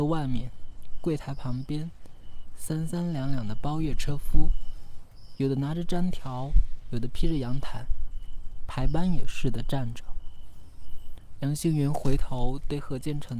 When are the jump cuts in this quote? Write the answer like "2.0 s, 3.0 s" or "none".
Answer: none